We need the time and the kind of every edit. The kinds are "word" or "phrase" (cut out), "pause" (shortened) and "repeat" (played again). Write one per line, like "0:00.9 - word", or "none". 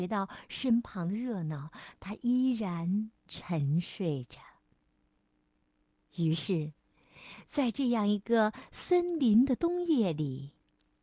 none